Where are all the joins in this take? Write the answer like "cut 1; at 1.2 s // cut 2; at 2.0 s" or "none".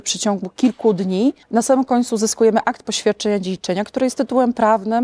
cut 1; at 1.4 s